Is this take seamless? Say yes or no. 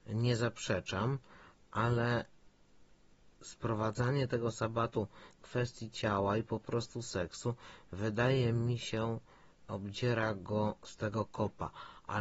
no